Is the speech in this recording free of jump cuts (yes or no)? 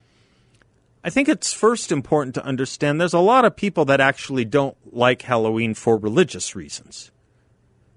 yes